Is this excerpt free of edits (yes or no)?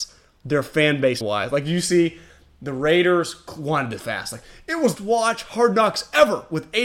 no